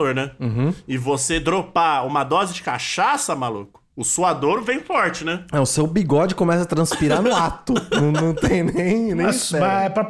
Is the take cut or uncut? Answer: uncut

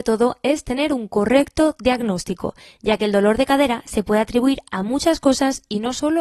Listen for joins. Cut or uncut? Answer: uncut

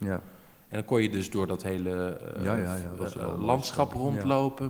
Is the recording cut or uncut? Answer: uncut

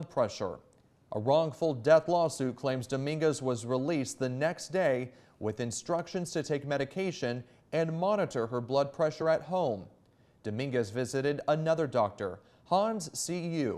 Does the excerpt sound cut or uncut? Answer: uncut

